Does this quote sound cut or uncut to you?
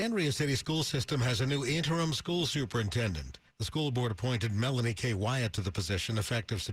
uncut